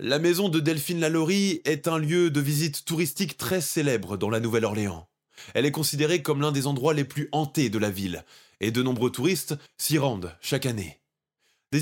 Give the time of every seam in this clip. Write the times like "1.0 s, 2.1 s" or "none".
9.7 s